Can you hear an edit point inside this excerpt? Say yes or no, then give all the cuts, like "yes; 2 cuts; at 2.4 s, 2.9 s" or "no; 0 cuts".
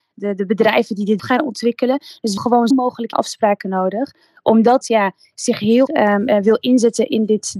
yes; 6 cuts; at 1.2 s, 2.4 s, 2.7 s, 3.1 s, 4.8 s, 5.9 s